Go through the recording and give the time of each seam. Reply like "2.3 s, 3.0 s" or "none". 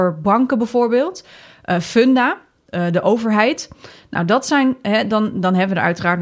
none